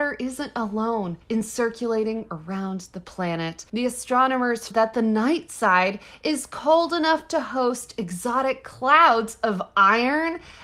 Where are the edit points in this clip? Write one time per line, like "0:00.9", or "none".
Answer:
0:01.2
0:03.7
0:04.7